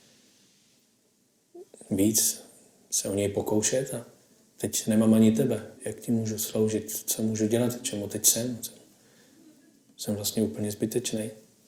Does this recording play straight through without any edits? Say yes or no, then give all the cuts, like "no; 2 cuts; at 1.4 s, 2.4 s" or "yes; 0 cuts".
no; 1 cut; at 5.8 s